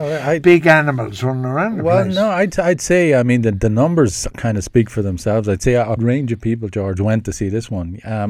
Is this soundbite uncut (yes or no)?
no